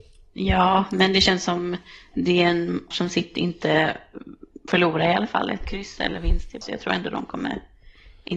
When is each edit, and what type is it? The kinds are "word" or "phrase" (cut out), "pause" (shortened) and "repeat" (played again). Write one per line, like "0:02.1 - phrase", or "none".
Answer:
0:02.9 - word
0:04.7 - word
0:06.6 - word